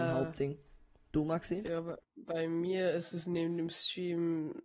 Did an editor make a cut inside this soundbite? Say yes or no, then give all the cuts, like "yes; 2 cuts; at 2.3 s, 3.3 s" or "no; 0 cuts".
no; 0 cuts